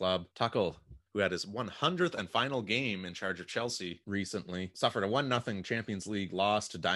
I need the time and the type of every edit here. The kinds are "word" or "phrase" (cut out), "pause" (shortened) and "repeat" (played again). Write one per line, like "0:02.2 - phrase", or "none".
0:01.1 - pause